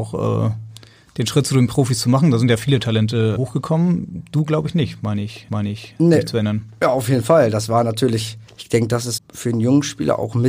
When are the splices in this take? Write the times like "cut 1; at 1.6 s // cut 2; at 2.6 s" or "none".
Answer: cut 1; at 3.4 s // cut 2; at 5.5 s // cut 3; at 8.5 s // cut 4; at 9.2 s